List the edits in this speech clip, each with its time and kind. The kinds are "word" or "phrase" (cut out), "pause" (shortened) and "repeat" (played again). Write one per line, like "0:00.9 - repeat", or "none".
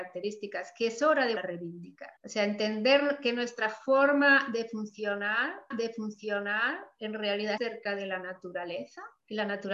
0:01.4 - word
0:02.2 - pause
0:05.7 - repeat
0:07.6 - phrase